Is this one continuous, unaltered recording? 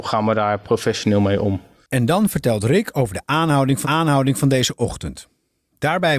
no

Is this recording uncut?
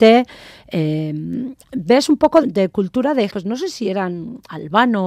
no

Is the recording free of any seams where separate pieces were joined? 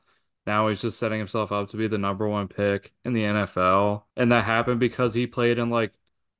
no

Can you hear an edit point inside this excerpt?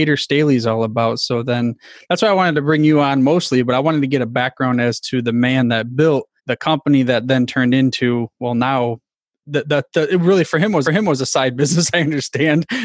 yes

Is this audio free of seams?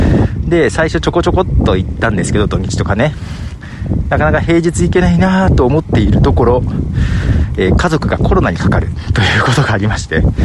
yes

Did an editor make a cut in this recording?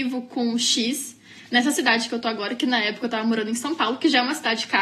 no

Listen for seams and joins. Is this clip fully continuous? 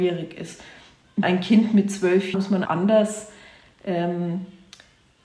no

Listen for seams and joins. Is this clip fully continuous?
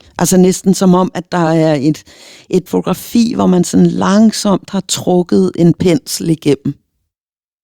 yes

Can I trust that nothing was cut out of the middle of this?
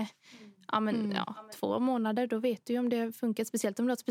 yes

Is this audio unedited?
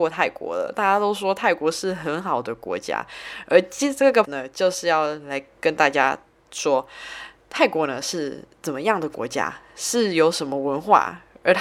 no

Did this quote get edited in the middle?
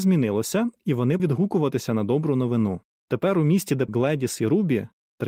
yes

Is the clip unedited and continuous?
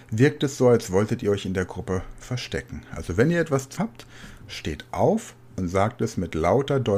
no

